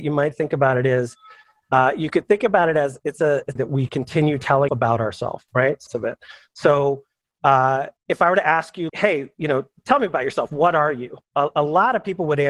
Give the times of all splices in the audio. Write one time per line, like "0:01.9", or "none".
0:03.6
0:04.7
0:05.5
0:05.9
0:08.0
0:08.9